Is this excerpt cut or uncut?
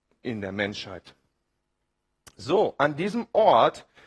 uncut